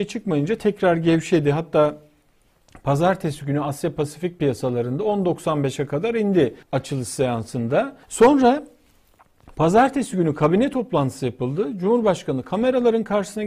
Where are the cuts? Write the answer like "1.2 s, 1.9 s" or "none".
6.6 s, 8.0 s